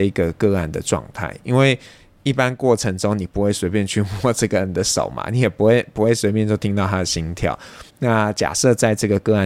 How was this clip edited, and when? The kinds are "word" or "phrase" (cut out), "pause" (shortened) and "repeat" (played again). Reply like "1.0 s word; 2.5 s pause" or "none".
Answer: 7.9 s pause